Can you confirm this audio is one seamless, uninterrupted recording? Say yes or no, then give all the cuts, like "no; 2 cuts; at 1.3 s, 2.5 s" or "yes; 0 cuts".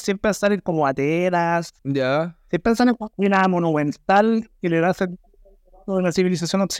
no; 2 cuts; at 1.8 s, 3.1 s